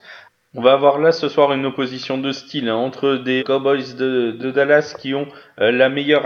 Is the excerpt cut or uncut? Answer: cut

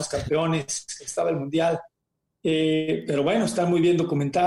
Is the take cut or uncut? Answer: uncut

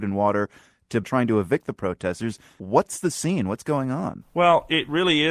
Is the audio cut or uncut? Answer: cut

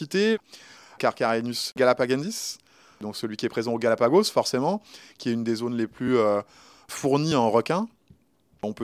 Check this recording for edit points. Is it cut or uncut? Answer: uncut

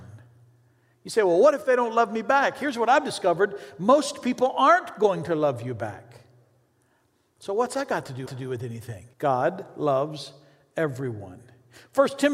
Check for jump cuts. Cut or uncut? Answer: cut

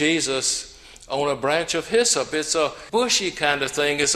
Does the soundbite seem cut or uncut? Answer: cut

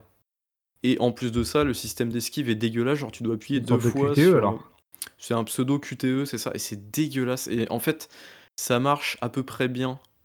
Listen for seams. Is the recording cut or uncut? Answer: uncut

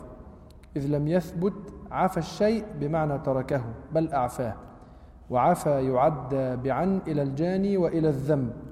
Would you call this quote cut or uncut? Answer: uncut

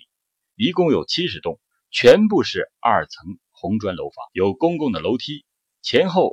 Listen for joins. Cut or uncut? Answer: cut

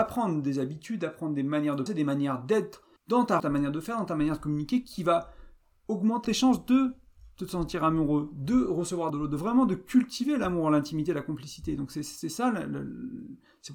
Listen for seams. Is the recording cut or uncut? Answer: cut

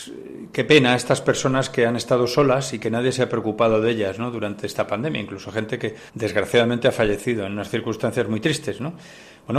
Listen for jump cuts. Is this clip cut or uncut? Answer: cut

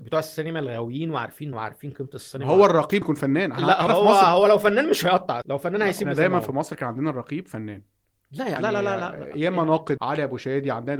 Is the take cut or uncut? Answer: cut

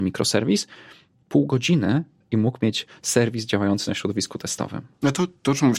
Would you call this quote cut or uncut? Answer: uncut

